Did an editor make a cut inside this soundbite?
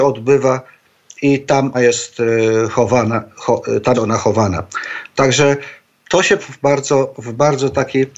yes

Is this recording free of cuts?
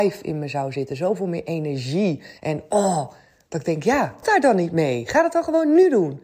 no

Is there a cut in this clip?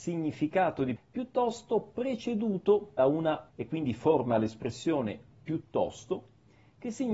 yes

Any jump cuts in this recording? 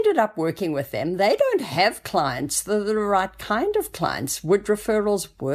no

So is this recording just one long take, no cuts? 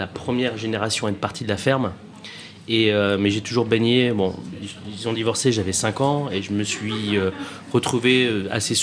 yes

